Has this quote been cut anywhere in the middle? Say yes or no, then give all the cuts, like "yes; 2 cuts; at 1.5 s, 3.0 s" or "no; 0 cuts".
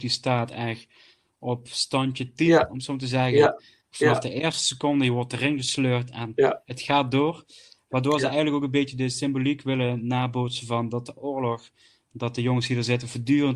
no; 0 cuts